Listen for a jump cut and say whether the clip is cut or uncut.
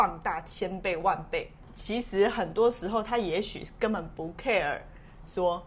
uncut